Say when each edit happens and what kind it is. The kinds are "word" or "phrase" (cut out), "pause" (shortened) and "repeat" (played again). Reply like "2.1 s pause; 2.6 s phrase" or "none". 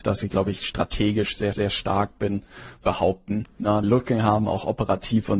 1.5 s repeat; 2.8 s phrase; 3.8 s phrase